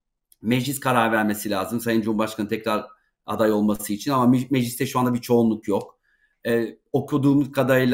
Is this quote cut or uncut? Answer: uncut